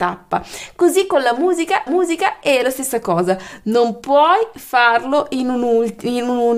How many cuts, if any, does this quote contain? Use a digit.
1